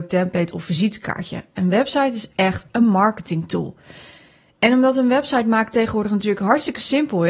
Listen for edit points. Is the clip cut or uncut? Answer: uncut